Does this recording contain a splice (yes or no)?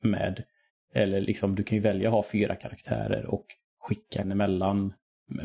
yes